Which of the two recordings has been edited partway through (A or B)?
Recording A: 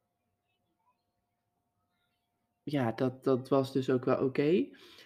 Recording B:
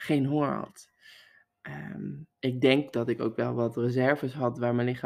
B